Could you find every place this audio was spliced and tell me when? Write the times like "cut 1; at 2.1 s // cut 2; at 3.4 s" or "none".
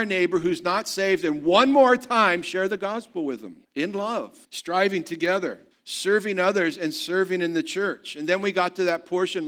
cut 1; at 3.6 s // cut 2; at 4.4 s // cut 3; at 5.7 s